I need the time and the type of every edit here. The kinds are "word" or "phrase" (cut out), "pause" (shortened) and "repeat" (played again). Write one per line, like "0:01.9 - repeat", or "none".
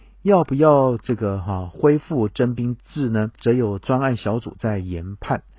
0:03.3 - pause